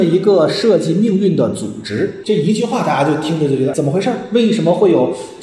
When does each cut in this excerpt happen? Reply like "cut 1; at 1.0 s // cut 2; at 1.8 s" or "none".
cut 1; at 2.2 s // cut 2; at 3.7 s